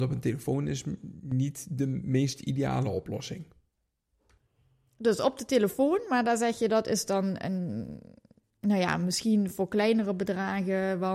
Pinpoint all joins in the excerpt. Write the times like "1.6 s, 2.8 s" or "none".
none